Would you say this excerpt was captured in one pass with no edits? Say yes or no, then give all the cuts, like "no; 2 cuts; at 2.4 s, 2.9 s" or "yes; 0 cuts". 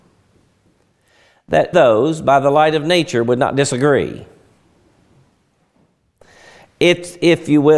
no; 1 cut; at 1.7 s